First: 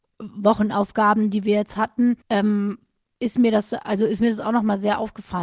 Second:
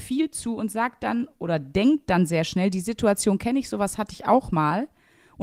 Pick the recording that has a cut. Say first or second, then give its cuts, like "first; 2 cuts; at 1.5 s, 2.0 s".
first; 1 cut; at 2.2 s